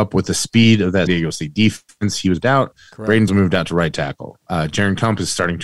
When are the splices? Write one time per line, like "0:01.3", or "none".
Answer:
0:01.1
0:02.4
0:03.3